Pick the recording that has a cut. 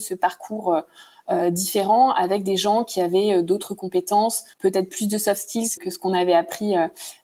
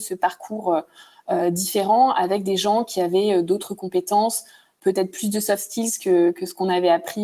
first; 2 cuts; at 4.5 s, 5.8 s

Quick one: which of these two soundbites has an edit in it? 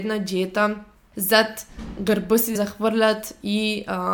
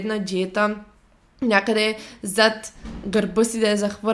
first; 2 cuts; at 1.1 s, 2.5 s

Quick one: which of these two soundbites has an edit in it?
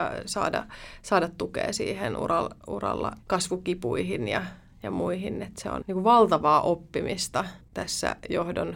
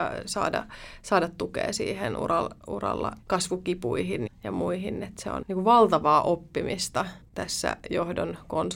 second; 1 cut; at 4.3 s

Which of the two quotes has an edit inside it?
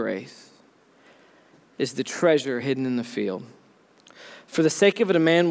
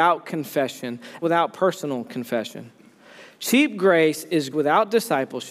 second; 2 cuts; at 1.2 s, 4.5 s

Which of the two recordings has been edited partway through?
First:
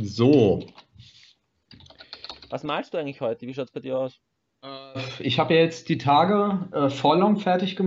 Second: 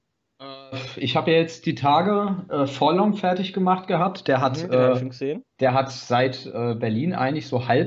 second; 1 cut; at 5.5 s

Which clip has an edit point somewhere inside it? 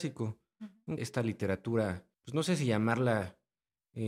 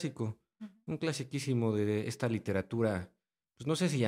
first; 2 cuts; at 1.0 s, 2.1 s

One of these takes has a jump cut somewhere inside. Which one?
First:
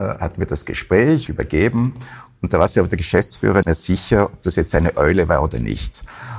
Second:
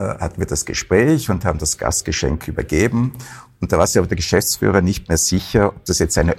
first; 2 cuts; at 1.3 s, 3.6 s

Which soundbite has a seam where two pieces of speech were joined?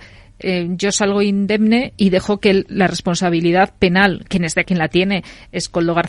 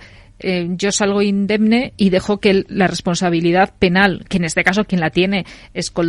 first; 1 cut; at 4.6 s

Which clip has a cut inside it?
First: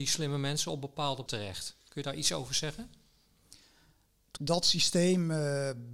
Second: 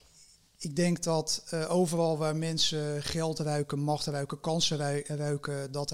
first; 3 cuts; at 1.3 s, 1.8 s, 4.4 s

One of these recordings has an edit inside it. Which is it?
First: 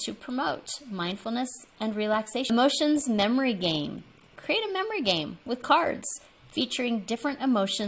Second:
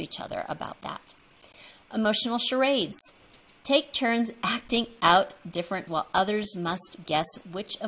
second; 1 cut; at 5.9 s

